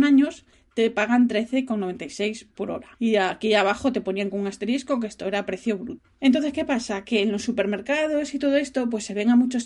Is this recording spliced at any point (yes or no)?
yes